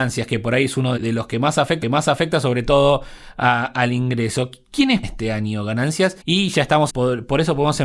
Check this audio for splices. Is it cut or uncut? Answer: cut